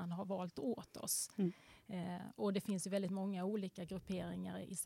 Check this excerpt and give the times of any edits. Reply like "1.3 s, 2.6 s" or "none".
2.4 s